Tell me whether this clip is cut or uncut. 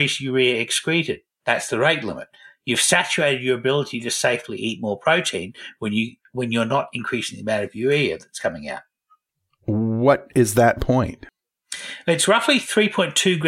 uncut